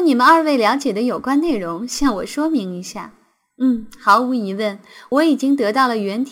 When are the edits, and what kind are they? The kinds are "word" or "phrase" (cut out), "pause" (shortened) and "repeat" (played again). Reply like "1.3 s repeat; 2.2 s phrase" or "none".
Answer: none